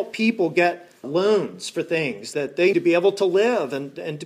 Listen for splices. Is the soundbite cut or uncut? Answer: cut